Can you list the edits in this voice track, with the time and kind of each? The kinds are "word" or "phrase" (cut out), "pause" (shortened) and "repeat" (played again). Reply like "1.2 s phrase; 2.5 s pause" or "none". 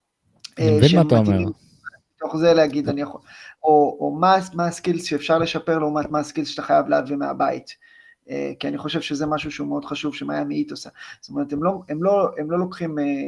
none